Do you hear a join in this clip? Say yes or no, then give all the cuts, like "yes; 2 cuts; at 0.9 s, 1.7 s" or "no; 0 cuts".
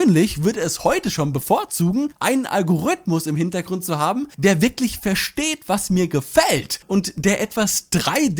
no; 0 cuts